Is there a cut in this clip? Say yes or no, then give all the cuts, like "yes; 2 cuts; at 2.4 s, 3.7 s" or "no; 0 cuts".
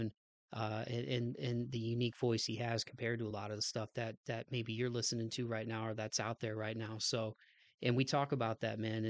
no; 0 cuts